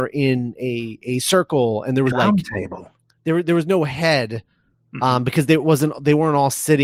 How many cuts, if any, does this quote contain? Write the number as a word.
one